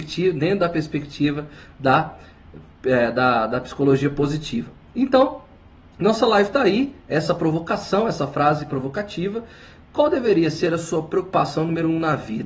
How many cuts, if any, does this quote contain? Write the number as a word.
zero